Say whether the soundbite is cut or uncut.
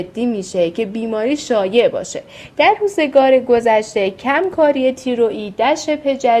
uncut